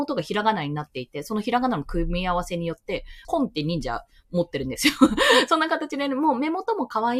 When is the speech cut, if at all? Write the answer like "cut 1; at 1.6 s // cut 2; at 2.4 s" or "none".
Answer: cut 1; at 3.2 s